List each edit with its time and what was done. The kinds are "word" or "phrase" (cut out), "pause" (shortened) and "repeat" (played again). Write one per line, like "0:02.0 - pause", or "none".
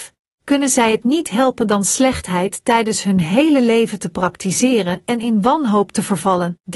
none